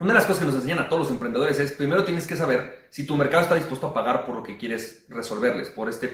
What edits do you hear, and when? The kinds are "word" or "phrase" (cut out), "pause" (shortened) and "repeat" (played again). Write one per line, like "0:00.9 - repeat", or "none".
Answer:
none